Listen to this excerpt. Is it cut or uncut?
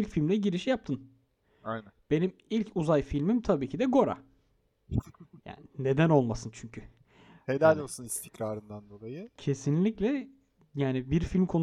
uncut